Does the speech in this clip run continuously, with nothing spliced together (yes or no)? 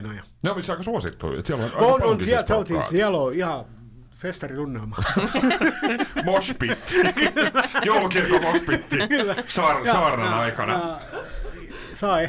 yes